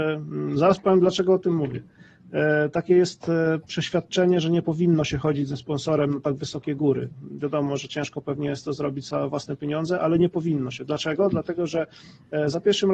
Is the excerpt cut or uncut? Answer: uncut